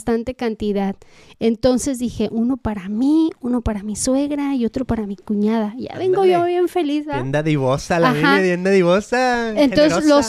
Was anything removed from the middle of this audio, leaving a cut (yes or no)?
no